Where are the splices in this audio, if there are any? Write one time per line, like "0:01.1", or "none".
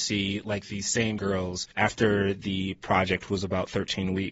0:01.2
0:01.7
0:03.3